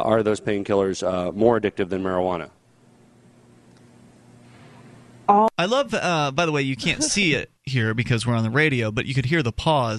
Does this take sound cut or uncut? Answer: cut